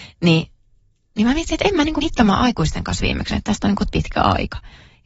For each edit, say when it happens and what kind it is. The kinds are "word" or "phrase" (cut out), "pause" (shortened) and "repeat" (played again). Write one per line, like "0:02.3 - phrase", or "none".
0:02.0 - word
0:03.3 - word
0:03.9 - word